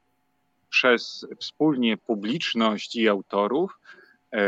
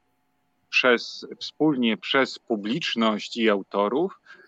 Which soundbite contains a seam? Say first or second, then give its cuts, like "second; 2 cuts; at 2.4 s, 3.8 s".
first; 1 cut; at 2.0 s